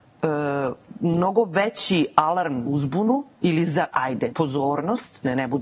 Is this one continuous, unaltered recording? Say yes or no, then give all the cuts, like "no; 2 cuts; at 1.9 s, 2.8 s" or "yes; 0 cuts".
no; 4 cuts; at 2.7 s, 3.3 s, 3.9 s, 4.3 s